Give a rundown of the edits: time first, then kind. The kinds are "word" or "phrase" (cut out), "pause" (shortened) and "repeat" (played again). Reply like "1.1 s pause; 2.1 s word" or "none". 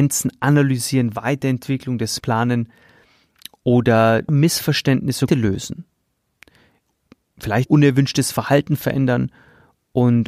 2.2 s word; 4.3 s word; 5.3 s word; 7.7 s word